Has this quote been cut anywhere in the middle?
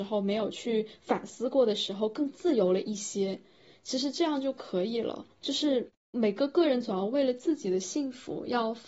yes; 1 cut; at 5.3 s

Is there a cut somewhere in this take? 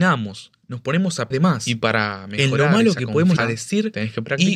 yes; 2 cuts; at 1.3 s, 3.4 s

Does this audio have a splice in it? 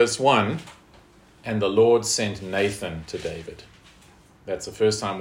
no; 0 cuts

